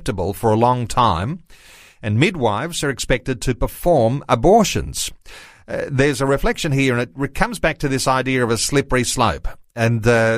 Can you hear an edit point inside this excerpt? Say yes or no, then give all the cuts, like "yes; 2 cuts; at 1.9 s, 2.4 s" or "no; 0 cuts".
no; 0 cuts